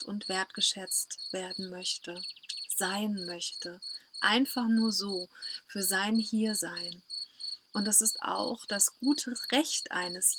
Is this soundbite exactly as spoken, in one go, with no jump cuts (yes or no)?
yes